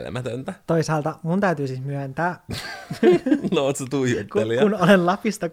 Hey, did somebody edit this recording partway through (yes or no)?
no